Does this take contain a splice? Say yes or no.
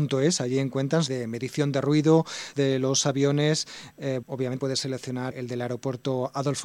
yes